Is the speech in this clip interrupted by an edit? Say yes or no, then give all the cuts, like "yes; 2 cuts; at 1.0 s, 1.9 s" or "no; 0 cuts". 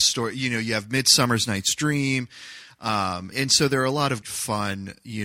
yes; 2 cuts; at 3.3 s, 4.2 s